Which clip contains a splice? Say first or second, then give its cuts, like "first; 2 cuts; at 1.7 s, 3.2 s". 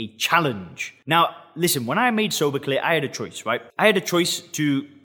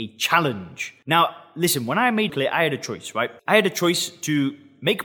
second; 1 cut; at 2.3 s